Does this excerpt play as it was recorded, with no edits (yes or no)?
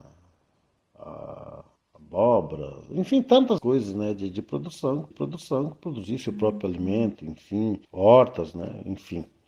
no